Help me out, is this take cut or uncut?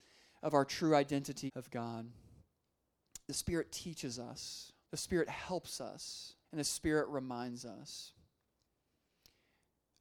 cut